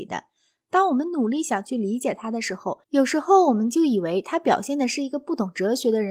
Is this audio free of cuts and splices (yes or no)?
no